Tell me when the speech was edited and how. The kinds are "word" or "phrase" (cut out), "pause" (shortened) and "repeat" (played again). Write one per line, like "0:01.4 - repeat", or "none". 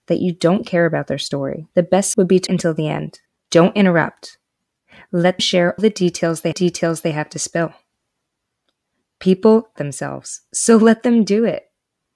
0:01.7 - pause
0:02.1 - word
0:02.5 - word
0:03.3 - pause
0:05.4 - word
0:05.8 - word
0:06.5 - repeat
0:09.8 - phrase